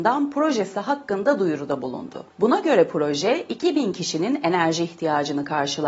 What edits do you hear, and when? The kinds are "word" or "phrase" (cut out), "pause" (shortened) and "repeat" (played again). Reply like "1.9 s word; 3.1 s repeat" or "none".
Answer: 2.3 s pause